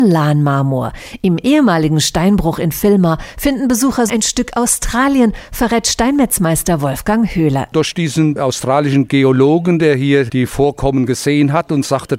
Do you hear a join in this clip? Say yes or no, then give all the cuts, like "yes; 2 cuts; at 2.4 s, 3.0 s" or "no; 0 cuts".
yes; 1 cut; at 4.1 s